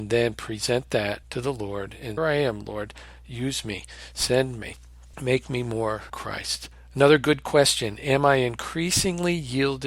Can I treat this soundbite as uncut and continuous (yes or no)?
no